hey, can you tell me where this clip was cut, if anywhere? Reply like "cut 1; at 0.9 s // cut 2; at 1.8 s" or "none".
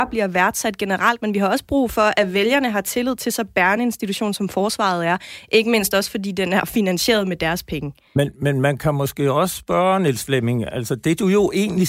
none